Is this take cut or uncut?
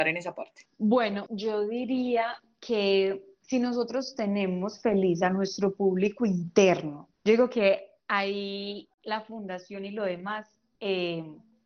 cut